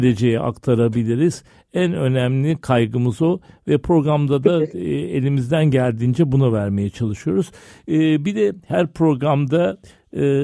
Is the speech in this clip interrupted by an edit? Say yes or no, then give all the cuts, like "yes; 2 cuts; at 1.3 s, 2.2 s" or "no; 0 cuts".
no; 0 cuts